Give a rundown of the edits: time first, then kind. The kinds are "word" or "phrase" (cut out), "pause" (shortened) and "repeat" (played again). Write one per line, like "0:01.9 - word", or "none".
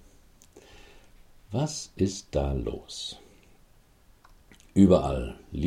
none